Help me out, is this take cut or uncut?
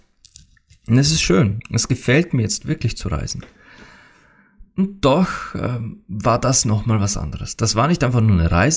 uncut